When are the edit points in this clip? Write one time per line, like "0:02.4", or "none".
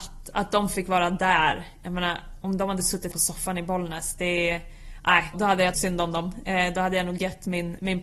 0:03.1
0:05.3
0:05.7